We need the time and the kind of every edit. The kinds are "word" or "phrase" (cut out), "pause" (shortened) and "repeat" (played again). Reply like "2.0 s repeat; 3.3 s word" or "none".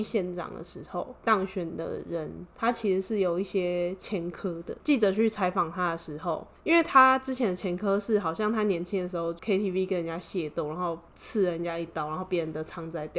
none